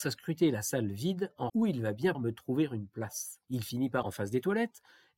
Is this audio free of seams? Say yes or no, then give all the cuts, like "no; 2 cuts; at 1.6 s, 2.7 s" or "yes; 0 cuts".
no; 4 cuts; at 1.5 s, 2.1 s, 3.4 s, 4.0 s